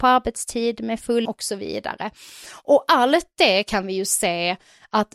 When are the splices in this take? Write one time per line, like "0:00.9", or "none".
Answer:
0:01.3